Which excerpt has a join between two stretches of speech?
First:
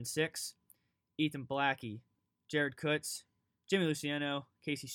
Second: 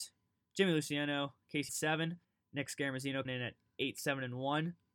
second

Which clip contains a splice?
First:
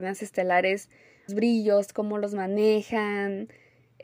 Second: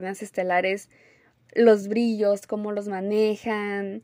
first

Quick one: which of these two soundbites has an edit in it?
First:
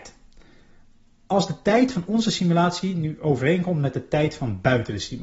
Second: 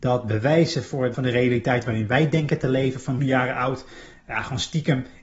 second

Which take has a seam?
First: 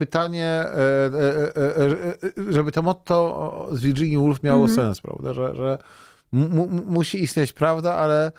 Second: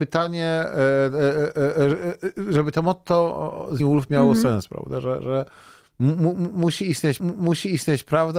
second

